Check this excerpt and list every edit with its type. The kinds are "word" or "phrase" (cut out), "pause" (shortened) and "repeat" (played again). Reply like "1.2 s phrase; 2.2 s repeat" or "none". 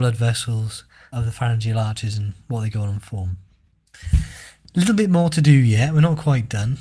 1.1 s word